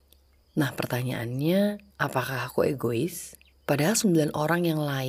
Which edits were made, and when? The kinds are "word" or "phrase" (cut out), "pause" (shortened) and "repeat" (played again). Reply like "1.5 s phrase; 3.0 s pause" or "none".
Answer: 1.9 s pause; 3.5 s pause